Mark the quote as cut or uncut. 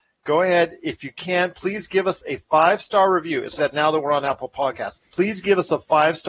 cut